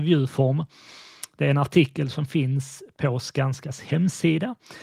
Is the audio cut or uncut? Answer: uncut